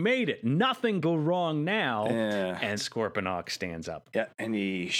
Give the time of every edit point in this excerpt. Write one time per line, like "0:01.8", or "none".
0:01.0
0:02.8